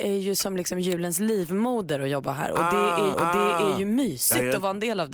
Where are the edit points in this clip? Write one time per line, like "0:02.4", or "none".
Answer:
0:03.1